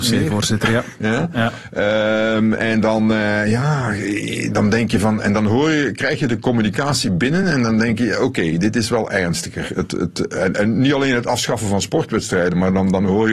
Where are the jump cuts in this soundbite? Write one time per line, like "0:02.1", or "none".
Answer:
none

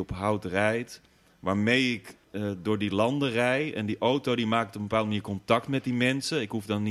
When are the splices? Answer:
0:02.2

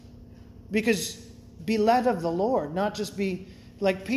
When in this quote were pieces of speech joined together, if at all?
0:01.6

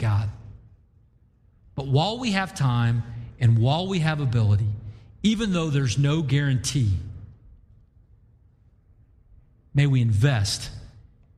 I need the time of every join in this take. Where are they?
none

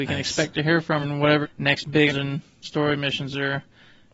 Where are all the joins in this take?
0:01.0
0:01.4
0:02.1
0:02.6

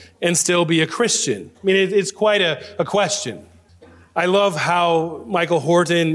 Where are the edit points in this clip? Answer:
0:03.7

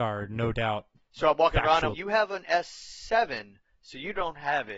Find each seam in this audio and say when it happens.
0:01.9

